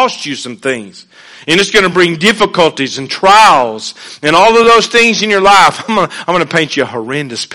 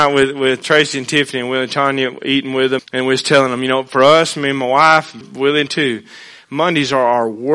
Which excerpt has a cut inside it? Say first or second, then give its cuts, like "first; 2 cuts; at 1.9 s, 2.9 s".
second; 3 cuts; at 2.8 s, 5.2 s, 5.7 s